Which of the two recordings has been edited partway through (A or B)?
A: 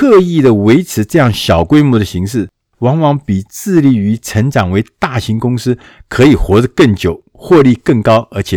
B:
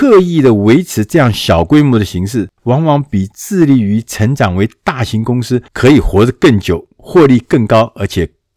B